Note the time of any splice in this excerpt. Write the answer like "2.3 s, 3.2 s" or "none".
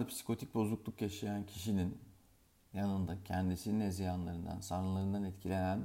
none